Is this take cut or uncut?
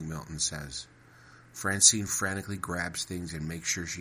uncut